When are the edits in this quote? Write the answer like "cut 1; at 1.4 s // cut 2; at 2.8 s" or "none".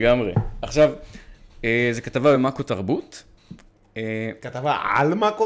none